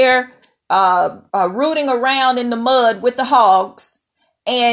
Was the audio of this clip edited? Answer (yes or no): yes